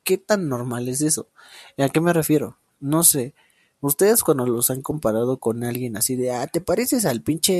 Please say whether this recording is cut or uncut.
uncut